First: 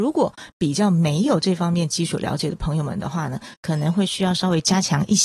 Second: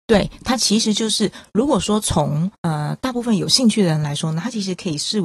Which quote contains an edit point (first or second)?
second